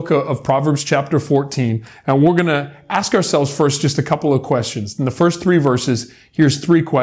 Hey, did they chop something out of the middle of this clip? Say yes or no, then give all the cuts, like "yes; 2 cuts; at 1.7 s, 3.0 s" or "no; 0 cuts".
no; 0 cuts